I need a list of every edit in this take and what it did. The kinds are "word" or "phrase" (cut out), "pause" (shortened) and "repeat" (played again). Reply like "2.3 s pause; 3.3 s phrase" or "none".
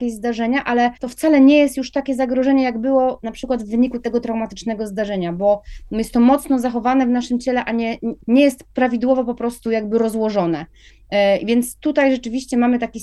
1.0 s pause; 8.2 s pause